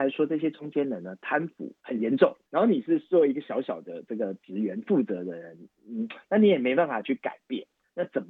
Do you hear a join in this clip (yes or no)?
yes